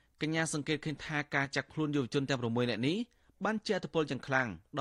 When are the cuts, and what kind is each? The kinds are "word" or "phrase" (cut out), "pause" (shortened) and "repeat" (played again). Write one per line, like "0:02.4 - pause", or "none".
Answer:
none